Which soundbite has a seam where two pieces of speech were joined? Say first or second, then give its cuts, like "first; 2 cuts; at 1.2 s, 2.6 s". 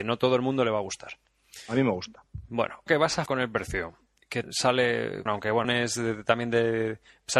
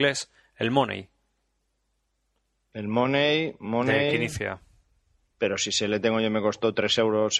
first; 5 cuts; at 2.9 s, 3.3 s, 4.4 s, 5.3 s, 5.6 s